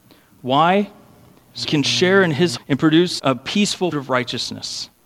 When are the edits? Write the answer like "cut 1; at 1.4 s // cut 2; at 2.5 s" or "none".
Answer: cut 1; at 1.6 s // cut 2; at 2.6 s // cut 3; at 3.2 s // cut 4; at 3.9 s